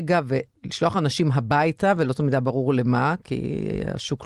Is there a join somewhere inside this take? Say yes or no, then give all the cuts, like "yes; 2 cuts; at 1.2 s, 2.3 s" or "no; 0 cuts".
no; 0 cuts